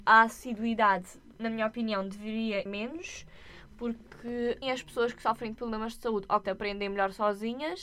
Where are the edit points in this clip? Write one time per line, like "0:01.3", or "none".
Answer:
0:01.3
0:02.7
0:04.6
0:06.4